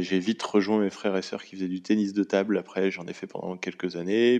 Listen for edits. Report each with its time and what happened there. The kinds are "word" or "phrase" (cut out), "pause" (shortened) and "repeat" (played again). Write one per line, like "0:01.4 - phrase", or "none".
none